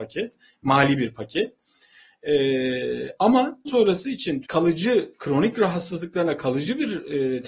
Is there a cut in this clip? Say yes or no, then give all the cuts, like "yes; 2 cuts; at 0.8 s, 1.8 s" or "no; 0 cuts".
yes; 2 cuts; at 3.6 s, 4.4 s